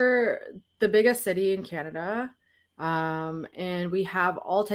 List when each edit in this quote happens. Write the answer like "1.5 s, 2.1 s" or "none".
none